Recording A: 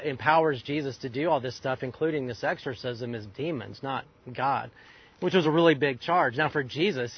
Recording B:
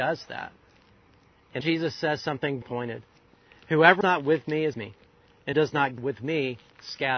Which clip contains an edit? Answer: B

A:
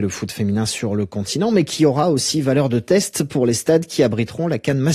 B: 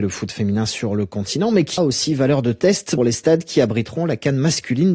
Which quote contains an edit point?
B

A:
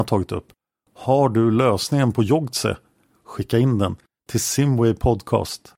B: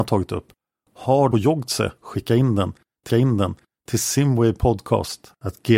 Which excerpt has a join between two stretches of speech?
B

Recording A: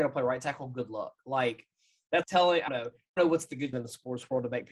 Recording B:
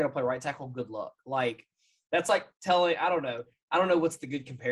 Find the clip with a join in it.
A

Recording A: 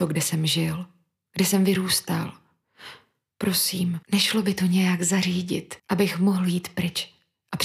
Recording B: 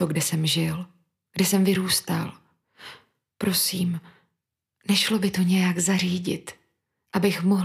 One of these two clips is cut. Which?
A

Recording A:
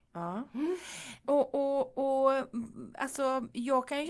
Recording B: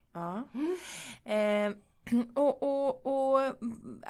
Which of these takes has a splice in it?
A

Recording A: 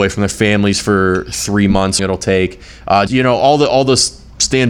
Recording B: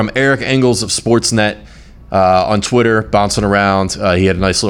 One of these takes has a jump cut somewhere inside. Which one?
A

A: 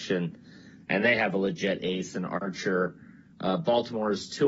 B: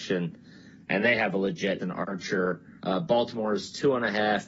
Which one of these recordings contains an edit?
B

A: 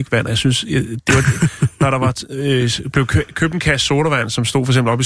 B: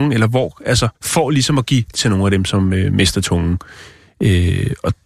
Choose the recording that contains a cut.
B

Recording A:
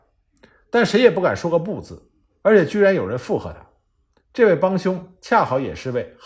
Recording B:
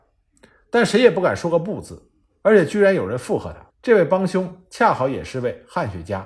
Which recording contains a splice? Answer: B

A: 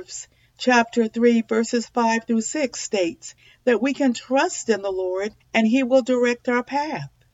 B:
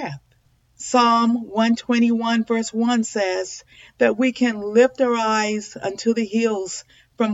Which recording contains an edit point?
A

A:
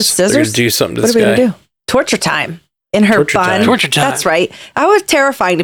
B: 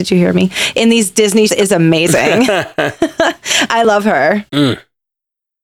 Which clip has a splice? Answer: B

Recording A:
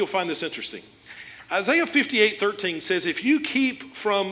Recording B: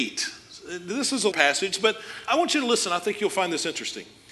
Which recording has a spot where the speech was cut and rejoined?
B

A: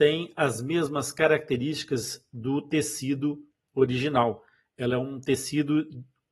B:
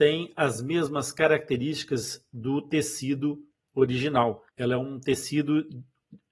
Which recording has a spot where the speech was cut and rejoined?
B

